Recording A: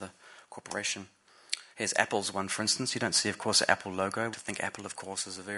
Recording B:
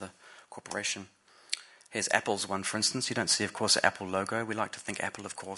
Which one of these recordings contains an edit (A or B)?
A